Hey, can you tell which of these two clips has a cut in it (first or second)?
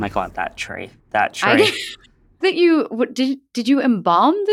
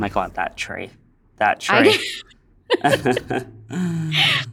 first